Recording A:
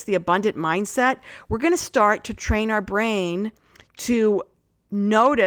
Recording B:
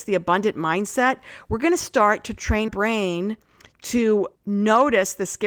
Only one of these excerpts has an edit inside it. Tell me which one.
B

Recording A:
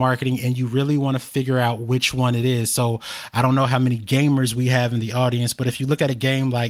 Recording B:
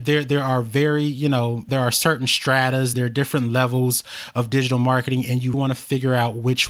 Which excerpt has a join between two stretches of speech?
B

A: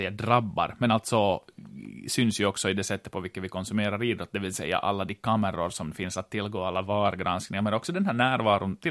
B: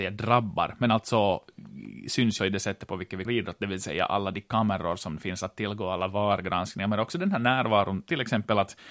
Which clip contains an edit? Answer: B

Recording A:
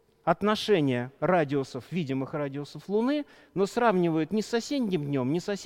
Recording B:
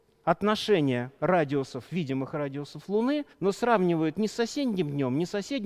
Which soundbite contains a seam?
B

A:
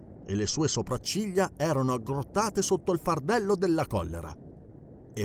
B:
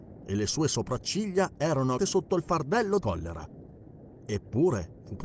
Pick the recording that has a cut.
B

